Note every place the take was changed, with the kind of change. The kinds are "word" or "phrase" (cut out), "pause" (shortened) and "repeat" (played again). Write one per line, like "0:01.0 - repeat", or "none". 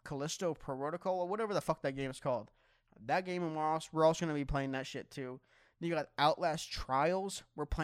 none

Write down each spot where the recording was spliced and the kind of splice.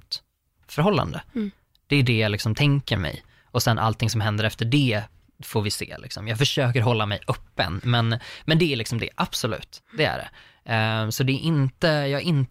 none

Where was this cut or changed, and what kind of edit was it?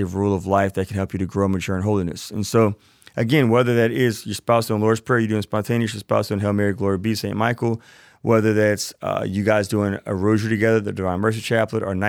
none

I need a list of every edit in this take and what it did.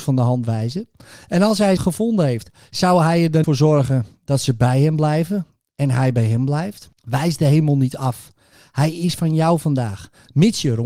0:01.8 - word
0:03.4 - word
0:06.9 - pause

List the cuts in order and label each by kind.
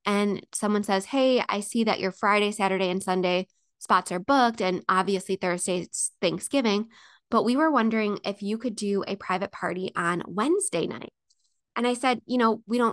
none

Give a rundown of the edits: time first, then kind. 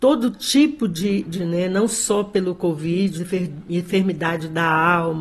0:01.4 - word
0:03.2 - word

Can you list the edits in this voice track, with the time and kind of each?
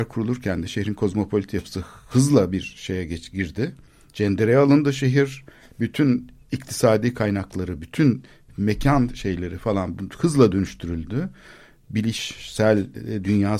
none

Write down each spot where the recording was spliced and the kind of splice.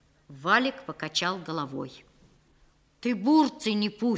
none

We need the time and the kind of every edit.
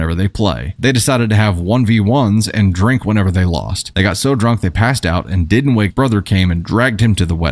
0:05.9 - phrase

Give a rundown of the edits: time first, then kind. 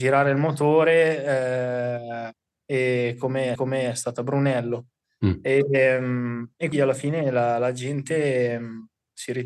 0:03.6 - repeat
0:06.7 - word

